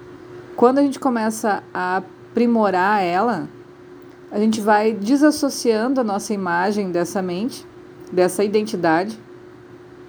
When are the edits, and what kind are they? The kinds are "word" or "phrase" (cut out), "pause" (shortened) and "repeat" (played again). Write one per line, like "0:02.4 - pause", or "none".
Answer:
none

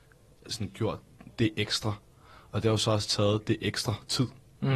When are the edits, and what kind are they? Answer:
none

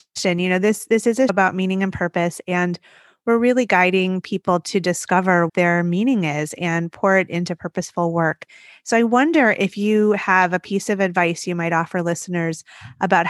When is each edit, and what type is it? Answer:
0:01.3 - word
0:05.5 - word

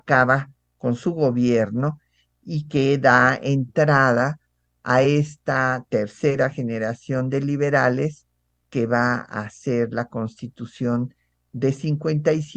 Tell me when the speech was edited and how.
none

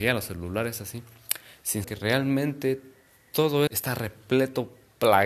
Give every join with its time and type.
0:01.8 - word
0:03.7 - word

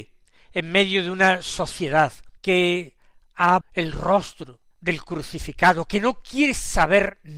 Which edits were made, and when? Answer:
0:02.4 - pause
0:03.6 - word
0:04.7 - pause

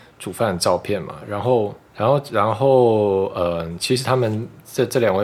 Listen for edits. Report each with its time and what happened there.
0:01.9 - pause

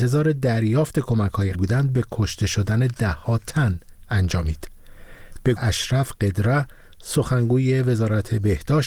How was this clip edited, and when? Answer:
0:01.5 - word
0:05.6 - word

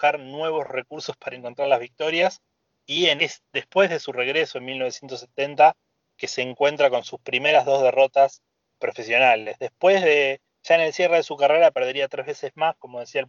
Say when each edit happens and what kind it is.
0:03.2 - word
0:08.7 - word

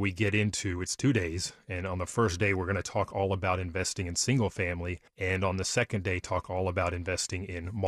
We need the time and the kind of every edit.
0:05.1 - pause

